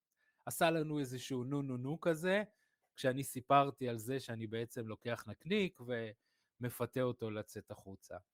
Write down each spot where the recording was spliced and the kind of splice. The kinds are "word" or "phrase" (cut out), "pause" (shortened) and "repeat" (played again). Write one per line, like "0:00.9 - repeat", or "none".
none